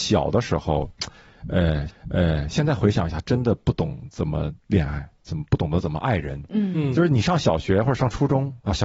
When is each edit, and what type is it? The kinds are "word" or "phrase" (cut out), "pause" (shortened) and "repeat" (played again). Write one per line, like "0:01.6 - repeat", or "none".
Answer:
0:01.9 - repeat
0:04.6 - pause